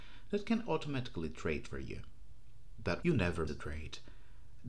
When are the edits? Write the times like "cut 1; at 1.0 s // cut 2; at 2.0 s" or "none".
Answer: cut 1; at 3.0 s // cut 2; at 3.5 s